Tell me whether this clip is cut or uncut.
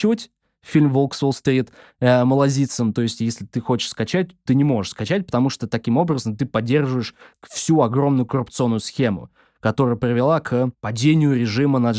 uncut